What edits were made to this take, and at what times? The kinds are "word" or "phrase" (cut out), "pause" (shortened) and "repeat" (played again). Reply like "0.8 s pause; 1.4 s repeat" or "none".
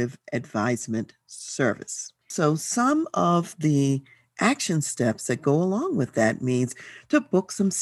2.2 s pause

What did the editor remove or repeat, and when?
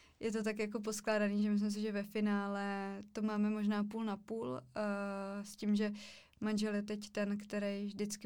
none

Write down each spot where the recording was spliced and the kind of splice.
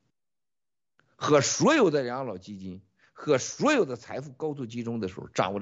none

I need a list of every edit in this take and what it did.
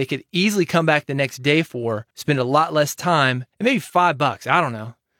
2.1 s pause; 3.5 s pause

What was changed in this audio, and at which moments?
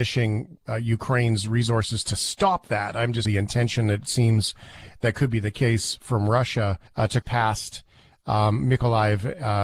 3.2 s phrase; 6.9 s pause; 7.2 s word

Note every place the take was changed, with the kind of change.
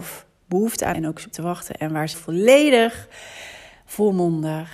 0.9 s word; 1.3 s word; 2.1 s word

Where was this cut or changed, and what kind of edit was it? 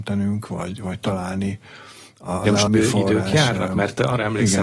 2.7 s word

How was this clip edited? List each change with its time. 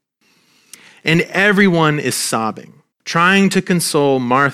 2.9 s pause

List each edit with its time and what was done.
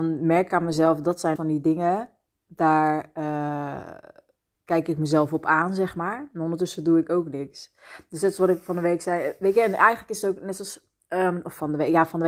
1.4 s word; 2.3 s pause; 4.5 s word

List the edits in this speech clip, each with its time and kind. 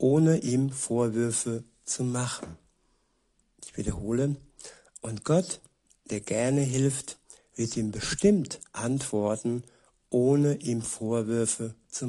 none

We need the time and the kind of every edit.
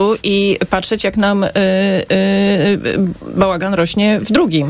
none

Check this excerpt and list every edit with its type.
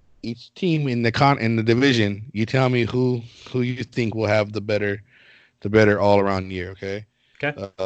none

